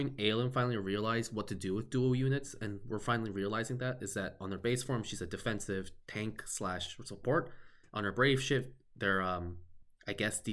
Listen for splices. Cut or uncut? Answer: uncut